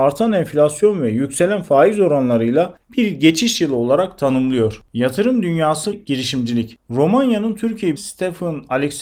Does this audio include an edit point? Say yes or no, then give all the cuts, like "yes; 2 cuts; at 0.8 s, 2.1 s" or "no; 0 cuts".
yes; 3 cuts; at 4.9 s, 5.9 s, 8.0 s